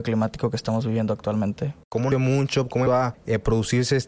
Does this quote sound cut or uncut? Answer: cut